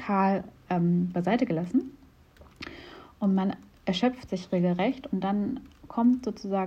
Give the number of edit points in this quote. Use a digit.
0